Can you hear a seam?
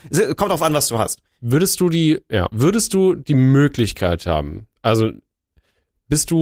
yes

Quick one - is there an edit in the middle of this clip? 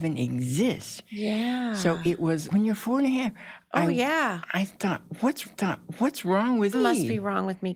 yes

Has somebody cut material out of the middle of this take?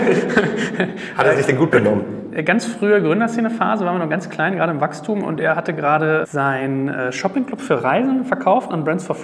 no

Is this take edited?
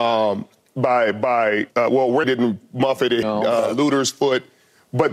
yes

